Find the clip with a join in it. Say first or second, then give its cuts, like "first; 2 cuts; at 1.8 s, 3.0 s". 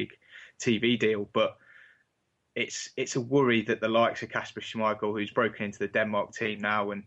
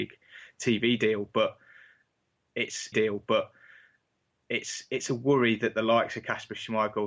second; 1 cut; at 2.9 s